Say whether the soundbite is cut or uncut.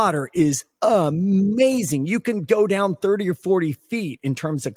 uncut